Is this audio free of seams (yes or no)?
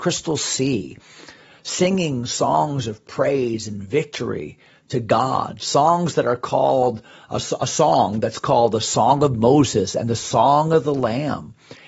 yes